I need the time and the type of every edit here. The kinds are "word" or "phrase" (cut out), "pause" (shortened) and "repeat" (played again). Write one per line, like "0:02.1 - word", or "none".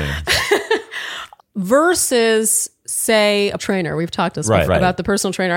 0:01.4 - word
0:03.6 - word
0:04.3 - word
0:04.7 - word